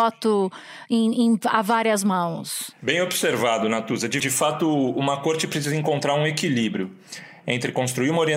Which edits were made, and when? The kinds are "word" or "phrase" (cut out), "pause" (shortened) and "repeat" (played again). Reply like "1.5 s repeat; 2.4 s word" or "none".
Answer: 4.2 s word